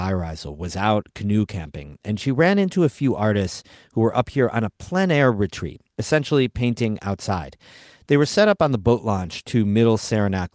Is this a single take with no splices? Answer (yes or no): yes